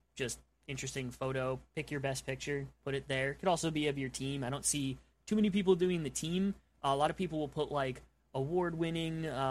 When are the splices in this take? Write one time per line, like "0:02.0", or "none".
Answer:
none